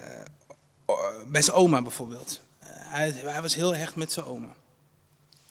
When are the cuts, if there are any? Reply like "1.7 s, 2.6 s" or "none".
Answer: none